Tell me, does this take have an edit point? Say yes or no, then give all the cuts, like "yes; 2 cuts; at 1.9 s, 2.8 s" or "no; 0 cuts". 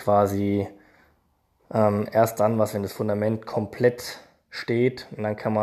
no; 0 cuts